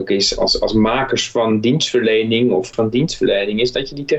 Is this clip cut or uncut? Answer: cut